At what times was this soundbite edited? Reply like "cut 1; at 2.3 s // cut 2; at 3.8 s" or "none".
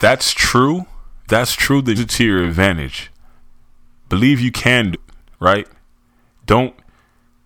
cut 1; at 1.3 s // cut 2; at 2.0 s // cut 3; at 4.9 s